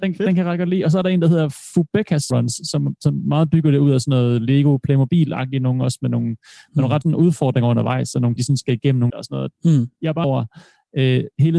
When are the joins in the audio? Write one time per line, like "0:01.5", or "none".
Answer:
0:02.3
0:07.0
0:08.4
0:09.1
0:10.2